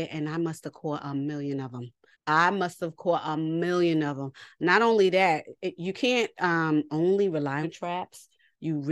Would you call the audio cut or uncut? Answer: cut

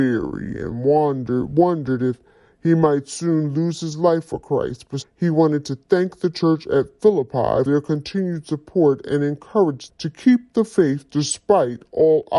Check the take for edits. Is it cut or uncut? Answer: cut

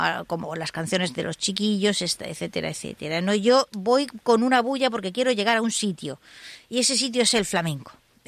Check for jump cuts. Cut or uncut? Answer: uncut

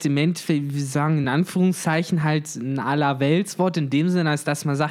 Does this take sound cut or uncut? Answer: uncut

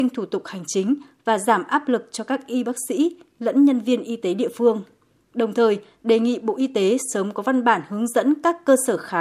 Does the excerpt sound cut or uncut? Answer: uncut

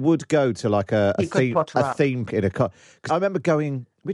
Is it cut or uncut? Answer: cut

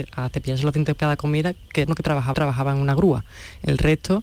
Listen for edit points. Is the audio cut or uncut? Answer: cut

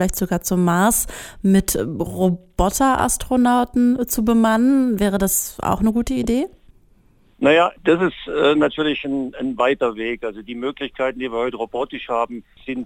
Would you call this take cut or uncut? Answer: uncut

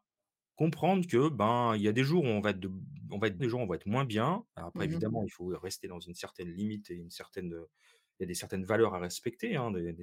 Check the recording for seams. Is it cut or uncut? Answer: cut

